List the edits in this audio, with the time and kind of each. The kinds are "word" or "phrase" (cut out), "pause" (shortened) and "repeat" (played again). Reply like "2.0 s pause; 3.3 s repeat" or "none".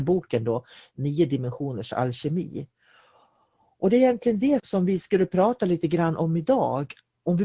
4.6 s word